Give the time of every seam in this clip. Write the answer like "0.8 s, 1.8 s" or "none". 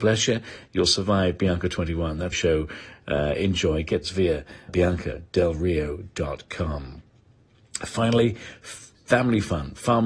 2.3 s, 4.0 s, 4.7 s

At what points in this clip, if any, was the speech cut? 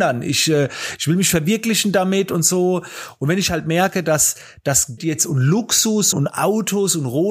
5.0 s, 6.1 s

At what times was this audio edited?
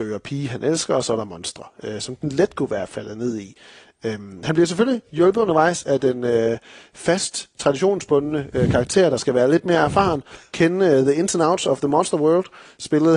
none

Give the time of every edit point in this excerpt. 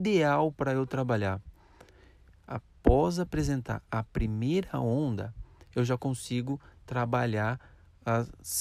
none

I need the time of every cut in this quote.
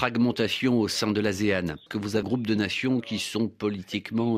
1.9 s, 2.2 s

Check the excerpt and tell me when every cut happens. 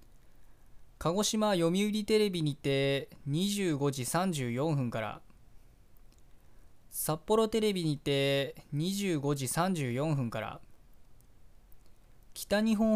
none

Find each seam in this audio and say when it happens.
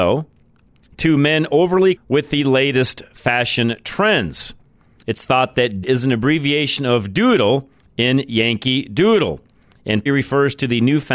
2.0 s, 5.8 s, 10.1 s

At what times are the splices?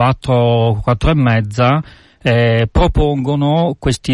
none

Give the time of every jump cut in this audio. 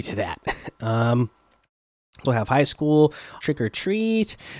2.3 s, 3.4 s

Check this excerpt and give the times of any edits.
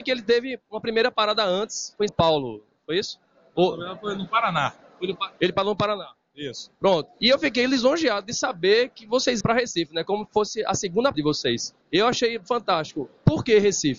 2.1 s, 5.4 s, 6.8 s, 9.4 s, 11.1 s, 11.8 s

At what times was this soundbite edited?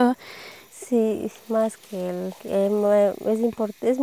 1.4 s, 2.4 s

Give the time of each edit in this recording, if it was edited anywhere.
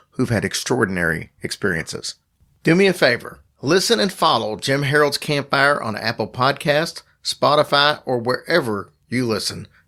none

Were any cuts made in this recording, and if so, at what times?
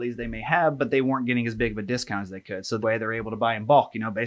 2.8 s

